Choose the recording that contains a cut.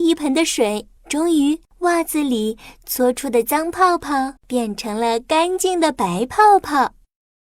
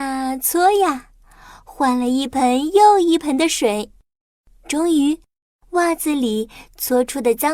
first; 3 cuts; at 1.0 s, 1.7 s, 4.4 s

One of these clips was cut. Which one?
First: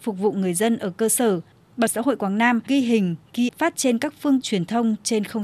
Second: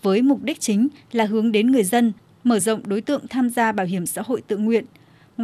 first; 4 cuts; at 1.9 s, 2.7 s, 3.5 s, 4.4 s

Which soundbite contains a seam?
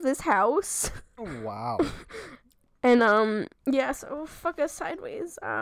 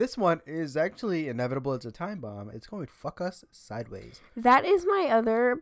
second; 3 cuts; at 1.9 s, 2.5 s, 2.9 s

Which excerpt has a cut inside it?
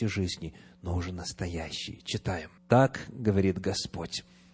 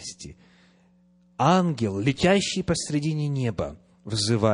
first; 1 cut; at 2.6 s

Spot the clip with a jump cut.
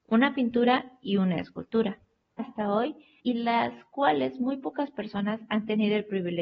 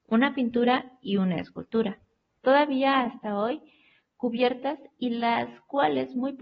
first; 2 cuts; at 2.4 s, 3.2 s

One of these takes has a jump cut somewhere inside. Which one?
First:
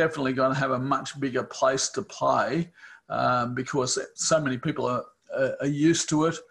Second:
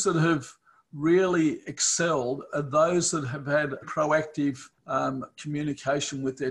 second; 2 cuts; at 3.8 s, 4.7 s

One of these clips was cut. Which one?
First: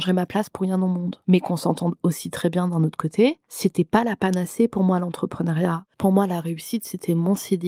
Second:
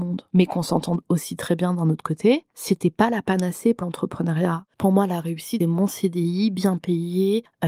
second; 2 cuts; at 3.8 s, 5.6 s

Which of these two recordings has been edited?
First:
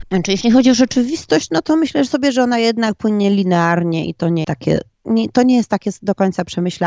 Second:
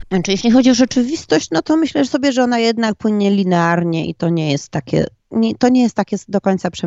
first; 1 cut; at 4.4 s

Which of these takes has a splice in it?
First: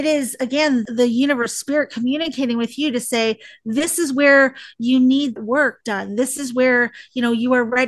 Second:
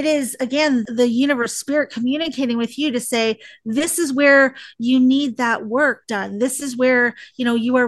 first; 1 cut; at 5.4 s

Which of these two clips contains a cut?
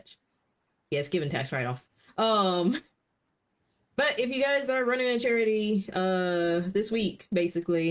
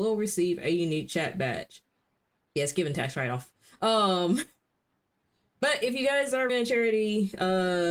second; 1 cut; at 6.5 s

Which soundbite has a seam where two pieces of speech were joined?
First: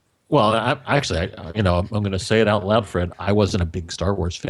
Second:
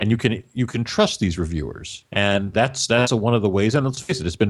second; 1 cut; at 2.1 s

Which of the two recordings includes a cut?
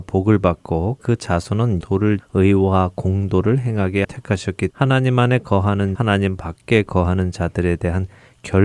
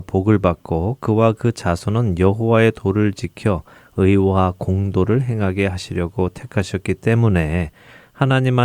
first; 6 cuts; at 1.0 s, 1.8 s, 2.2 s, 4.0 s, 4.7 s, 5.9 s

